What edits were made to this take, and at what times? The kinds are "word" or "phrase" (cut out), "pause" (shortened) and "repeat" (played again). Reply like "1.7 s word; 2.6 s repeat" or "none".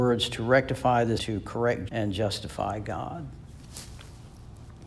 1.2 s word; 1.9 s word